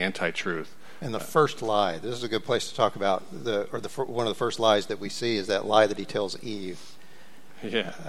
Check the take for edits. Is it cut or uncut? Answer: uncut